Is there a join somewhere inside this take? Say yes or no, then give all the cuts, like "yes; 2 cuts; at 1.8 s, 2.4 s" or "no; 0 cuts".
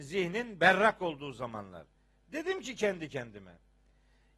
no; 0 cuts